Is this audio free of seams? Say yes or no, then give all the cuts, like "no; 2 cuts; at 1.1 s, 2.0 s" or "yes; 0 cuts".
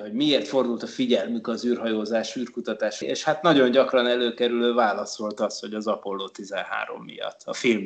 no; 1 cut; at 3.0 s